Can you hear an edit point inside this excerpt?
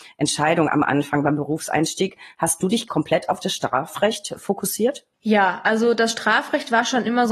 yes; 2 cuts; at 2.9 s, 5.1 s

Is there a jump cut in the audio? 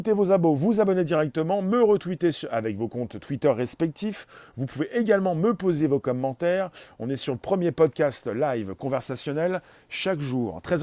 no; 0 cuts

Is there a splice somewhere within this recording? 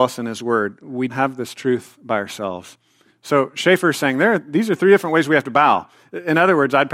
yes; 1 cut; at 1.1 s

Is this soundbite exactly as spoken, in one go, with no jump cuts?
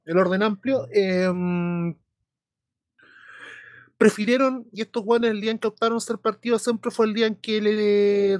yes; 0 cuts

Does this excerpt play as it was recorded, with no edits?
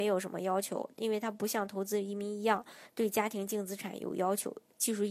yes; 0 cuts

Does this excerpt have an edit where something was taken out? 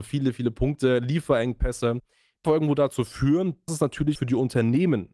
yes; 3 cuts; at 2.4 s, 3.7 s, 4.1 s

